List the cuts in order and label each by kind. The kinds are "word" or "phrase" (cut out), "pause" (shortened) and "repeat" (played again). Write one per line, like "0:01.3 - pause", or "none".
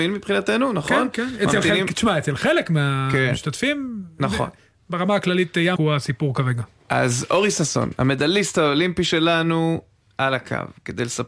0:05.8 - word